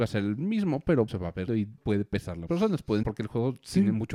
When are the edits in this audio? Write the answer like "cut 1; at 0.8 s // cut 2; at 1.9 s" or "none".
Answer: cut 1; at 1.1 s // cut 2; at 1.5 s // cut 3; at 1.8 s // cut 4; at 2.5 s // cut 5; at 3.0 s